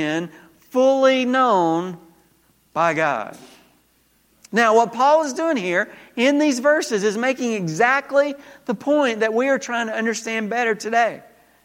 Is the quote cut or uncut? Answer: uncut